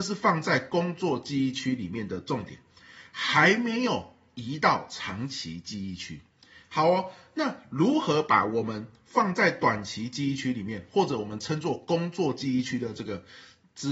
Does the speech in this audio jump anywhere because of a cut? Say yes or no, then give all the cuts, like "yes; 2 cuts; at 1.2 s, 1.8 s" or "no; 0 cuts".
no; 0 cuts